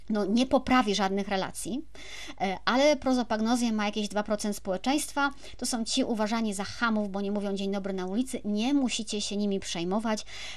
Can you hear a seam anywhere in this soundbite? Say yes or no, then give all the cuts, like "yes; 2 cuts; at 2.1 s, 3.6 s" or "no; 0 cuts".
no; 0 cuts